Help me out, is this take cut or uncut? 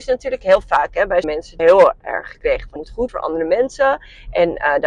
cut